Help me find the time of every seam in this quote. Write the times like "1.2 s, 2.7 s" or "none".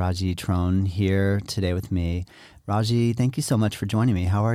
none